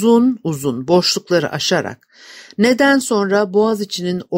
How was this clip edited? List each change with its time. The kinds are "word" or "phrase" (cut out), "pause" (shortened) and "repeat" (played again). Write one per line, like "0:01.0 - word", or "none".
none